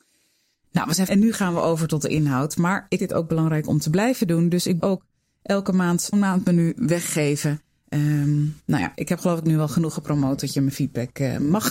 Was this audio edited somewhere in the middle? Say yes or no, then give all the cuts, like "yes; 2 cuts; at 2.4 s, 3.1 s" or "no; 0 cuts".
yes; 4 cuts; at 1.1 s, 3.0 s, 4.8 s, 6.1 s